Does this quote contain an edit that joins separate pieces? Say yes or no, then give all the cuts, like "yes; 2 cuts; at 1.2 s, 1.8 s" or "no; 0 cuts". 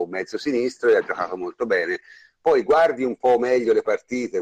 no; 0 cuts